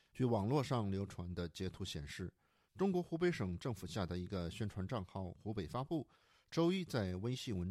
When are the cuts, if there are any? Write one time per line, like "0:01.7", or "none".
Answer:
none